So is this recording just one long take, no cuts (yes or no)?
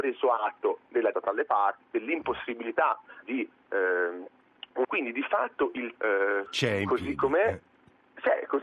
no